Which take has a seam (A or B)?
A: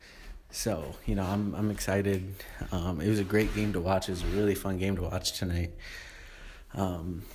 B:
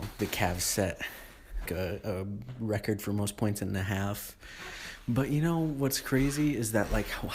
B